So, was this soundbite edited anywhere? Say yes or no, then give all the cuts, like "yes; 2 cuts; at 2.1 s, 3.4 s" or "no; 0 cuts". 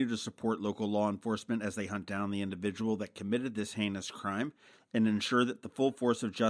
no; 0 cuts